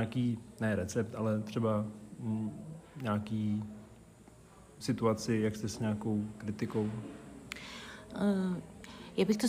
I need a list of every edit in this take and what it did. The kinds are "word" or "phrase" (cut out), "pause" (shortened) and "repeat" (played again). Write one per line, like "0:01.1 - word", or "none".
0:04.8 - word
0:05.7 - word